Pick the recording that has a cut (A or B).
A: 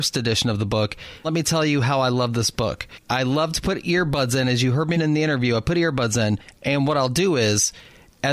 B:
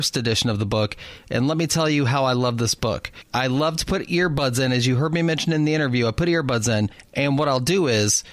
A